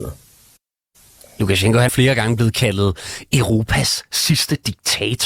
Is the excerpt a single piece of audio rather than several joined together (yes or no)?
no